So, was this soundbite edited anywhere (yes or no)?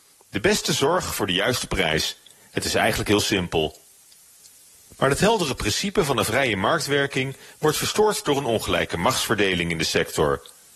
no